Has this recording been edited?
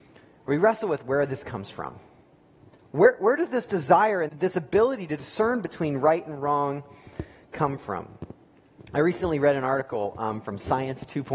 yes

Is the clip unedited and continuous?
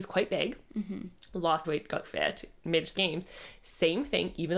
no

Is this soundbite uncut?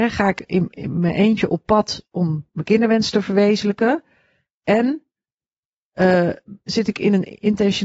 yes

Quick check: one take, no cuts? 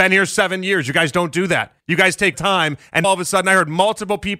no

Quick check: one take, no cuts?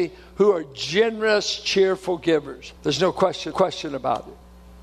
no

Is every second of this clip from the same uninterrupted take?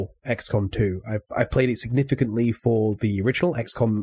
yes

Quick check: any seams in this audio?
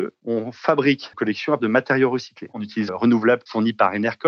yes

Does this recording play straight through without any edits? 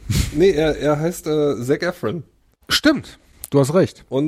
yes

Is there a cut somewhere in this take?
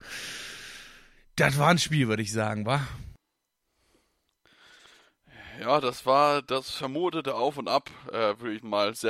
no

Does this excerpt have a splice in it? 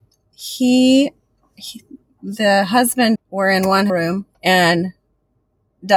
yes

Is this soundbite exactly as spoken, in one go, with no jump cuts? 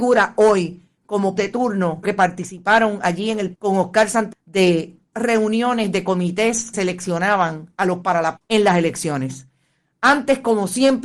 no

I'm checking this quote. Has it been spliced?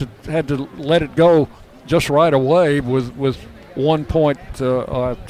no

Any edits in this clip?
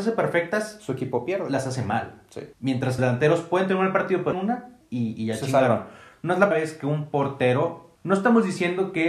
yes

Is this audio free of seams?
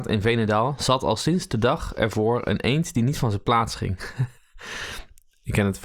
no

